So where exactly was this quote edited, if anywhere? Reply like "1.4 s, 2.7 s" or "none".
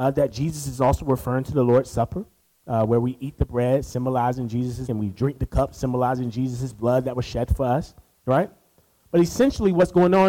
4.9 s